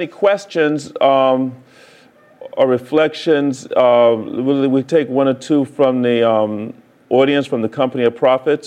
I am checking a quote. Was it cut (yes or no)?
no